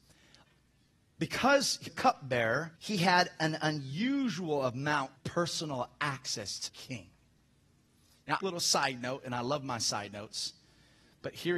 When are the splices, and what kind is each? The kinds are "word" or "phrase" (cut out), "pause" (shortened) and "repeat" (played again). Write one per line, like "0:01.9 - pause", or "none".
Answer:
0:01.9 - word
0:02.8 - pause
0:05.2 - word
0:06.7 - word
0:08.4 - phrase